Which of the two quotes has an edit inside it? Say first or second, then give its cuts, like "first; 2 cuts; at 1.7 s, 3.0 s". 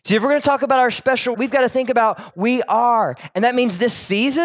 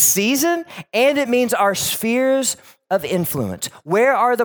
first; 2 cuts; at 1.3 s, 2.3 s